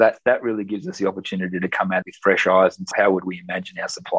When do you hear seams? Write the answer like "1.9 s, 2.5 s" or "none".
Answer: 2.0 s, 2.9 s